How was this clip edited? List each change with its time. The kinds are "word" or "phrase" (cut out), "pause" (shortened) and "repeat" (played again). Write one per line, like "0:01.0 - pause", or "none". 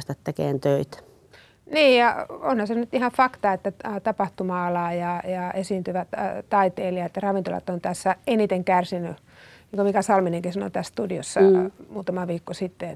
none

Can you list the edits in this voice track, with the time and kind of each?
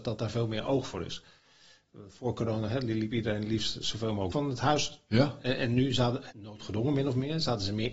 0:04.3 - word
0:06.3 - word

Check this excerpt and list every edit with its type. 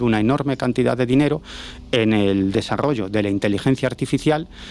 none

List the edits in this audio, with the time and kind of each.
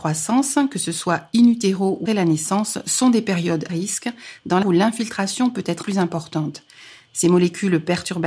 0:02.1 - word
0:03.7 - word
0:04.6 - word
0:05.8 - word

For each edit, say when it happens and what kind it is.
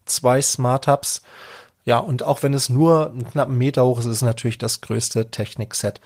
none

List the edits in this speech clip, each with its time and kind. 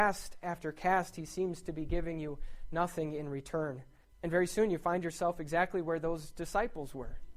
0:04.0 - pause

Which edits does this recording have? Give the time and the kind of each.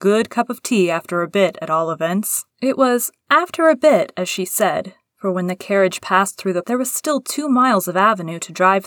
0:02.5 - pause
0:06.6 - phrase

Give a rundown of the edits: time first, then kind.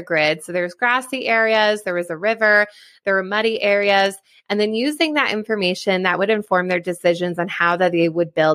none

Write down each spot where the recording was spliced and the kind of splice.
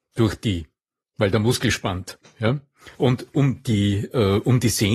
0:02.9 - pause

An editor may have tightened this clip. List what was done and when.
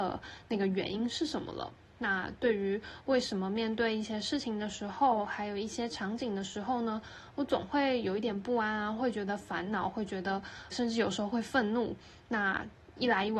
0:10.7 - word

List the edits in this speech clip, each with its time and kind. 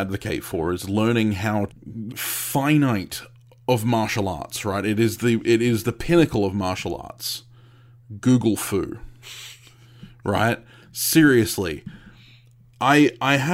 0:01.7 - phrase
0:02.1 - word

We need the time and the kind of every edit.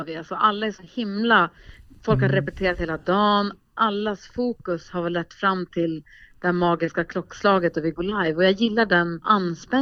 none

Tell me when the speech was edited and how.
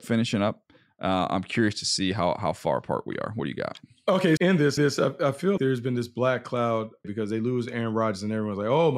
0:04.4 - word
0:04.8 - repeat
0:05.6 - word
0:07.0 - phrase

